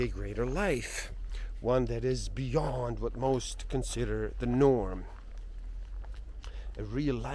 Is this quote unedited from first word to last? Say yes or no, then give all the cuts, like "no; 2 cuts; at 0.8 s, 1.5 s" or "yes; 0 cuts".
yes; 0 cuts